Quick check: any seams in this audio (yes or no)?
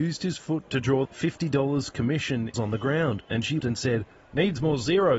yes